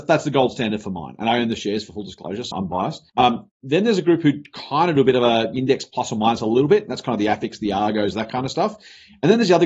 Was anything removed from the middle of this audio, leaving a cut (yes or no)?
yes